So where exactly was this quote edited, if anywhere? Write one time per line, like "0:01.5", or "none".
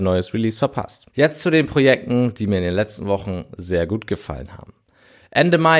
0:01.1